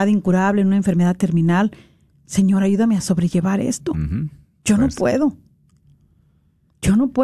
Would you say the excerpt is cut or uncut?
uncut